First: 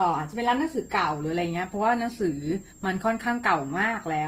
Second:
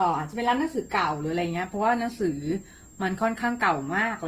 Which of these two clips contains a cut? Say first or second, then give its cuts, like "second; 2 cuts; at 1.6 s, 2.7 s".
first; 1 cut; at 2.7 s